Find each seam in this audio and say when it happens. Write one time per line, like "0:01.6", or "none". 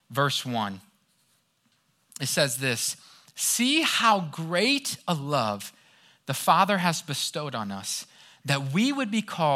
none